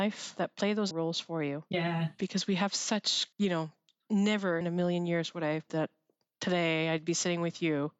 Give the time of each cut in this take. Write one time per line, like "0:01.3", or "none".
0:00.9
0:03.3
0:04.6
0:05.7